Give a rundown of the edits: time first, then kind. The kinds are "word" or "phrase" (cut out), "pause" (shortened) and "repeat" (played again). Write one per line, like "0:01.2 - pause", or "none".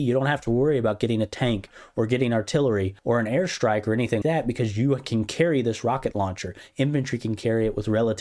0:03.0 - pause
0:04.2 - word